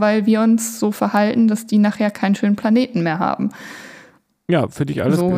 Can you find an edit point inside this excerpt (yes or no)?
no